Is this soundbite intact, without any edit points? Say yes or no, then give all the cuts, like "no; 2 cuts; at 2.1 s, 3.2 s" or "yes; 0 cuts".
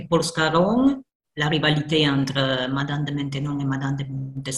yes; 0 cuts